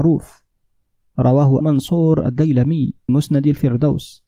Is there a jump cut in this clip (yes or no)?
yes